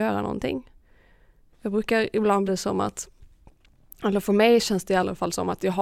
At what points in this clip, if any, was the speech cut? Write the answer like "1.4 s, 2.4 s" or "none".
2.5 s